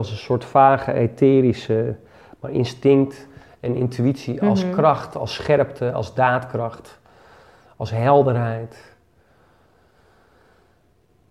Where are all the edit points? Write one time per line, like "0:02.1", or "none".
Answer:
none

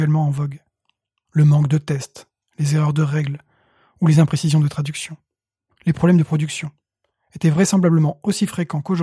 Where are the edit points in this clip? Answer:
none

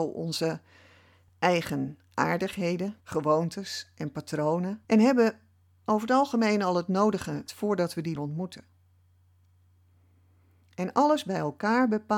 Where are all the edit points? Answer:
0:03.0
0:04.8
0:07.5
0:08.2

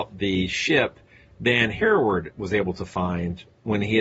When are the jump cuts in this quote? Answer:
none

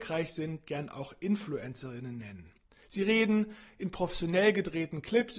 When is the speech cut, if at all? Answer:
none

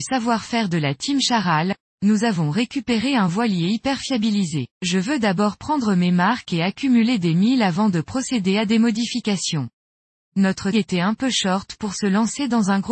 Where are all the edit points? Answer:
0:04.7
0:10.7

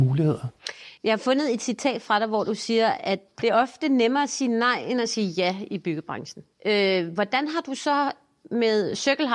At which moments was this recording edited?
0:01.0
0:06.5

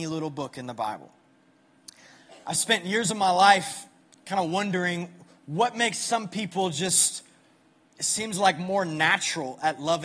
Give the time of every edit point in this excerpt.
none

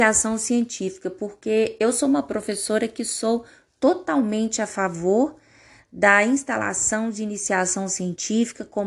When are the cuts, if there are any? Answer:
none

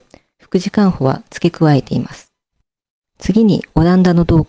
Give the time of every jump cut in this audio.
0:02.6

